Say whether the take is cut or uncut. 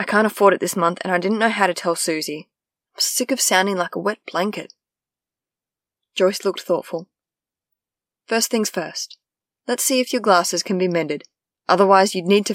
uncut